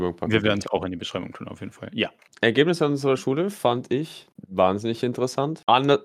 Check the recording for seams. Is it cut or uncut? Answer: uncut